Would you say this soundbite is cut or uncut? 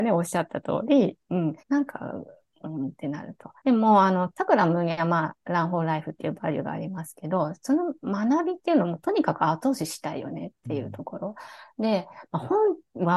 cut